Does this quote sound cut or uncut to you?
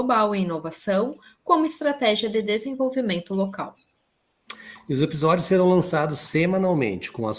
uncut